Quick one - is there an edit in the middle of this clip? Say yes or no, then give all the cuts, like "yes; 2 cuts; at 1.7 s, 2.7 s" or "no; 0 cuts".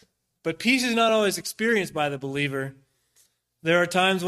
no; 0 cuts